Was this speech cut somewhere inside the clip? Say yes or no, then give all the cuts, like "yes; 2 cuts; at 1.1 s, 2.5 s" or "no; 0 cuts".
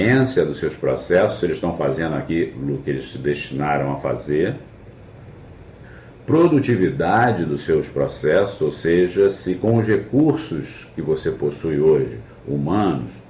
no; 0 cuts